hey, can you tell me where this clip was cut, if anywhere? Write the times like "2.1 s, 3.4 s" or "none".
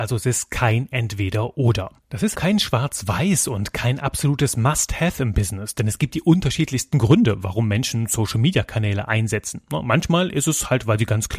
2.3 s